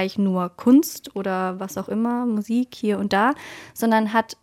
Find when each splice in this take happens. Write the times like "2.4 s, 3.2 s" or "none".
none